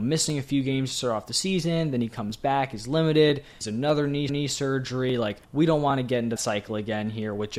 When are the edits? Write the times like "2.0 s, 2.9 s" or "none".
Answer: 3.6 s, 4.3 s, 5.4 s, 6.4 s